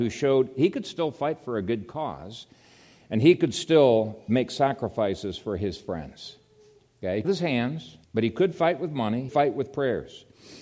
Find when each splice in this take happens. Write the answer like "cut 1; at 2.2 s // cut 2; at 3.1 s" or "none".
cut 1; at 7.2 s // cut 2; at 8.0 s // cut 3; at 9.3 s